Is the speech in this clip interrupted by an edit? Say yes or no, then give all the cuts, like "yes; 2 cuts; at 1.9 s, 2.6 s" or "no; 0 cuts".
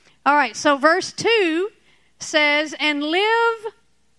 no; 0 cuts